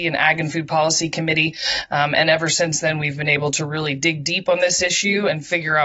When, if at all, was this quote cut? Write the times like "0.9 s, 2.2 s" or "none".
none